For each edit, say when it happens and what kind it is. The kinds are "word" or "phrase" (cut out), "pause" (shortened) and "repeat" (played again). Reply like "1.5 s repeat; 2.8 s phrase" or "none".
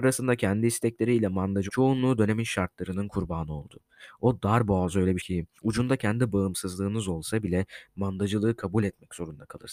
1.7 s phrase; 5.2 s word; 5.6 s pause

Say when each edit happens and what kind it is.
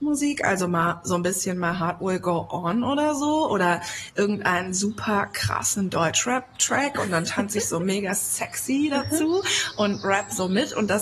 none

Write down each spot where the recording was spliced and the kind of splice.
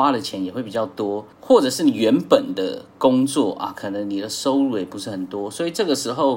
1.3 s pause

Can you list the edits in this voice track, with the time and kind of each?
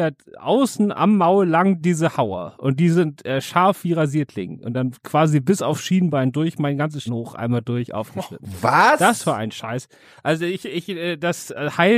7.1 s word

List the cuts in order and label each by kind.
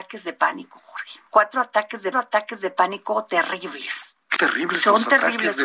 1.3 s pause; 2.1 s repeat; 4.4 s word

